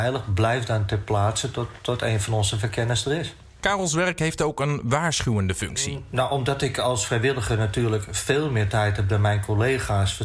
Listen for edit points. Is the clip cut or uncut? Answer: uncut